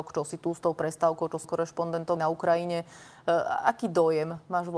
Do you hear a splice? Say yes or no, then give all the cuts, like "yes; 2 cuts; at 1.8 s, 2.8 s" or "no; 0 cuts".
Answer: yes; 2 cuts; at 1.4 s, 2.2 s